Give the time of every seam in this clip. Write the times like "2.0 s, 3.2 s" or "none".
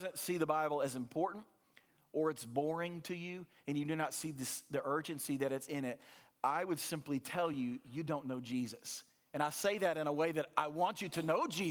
none